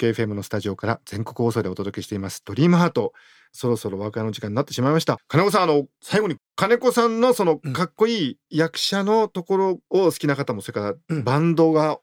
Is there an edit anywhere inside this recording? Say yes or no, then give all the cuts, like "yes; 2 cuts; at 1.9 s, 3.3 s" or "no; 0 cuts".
no; 0 cuts